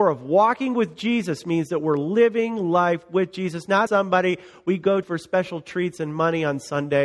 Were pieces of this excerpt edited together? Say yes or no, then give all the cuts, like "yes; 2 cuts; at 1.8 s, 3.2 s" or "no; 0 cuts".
yes; 2 cuts; at 3.9 s, 5.0 s